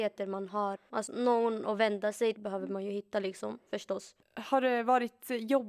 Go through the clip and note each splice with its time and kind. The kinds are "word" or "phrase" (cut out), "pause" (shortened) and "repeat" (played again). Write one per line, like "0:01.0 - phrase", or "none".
0:01.1 - word
0:02.4 - word
0:04.2 - pause